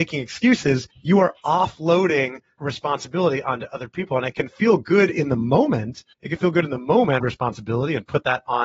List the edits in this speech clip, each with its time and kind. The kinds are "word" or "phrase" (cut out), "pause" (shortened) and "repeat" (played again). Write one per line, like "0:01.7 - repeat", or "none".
0:00.9 - pause
0:02.6 - word
0:06.1 - pause
0:07.2 - phrase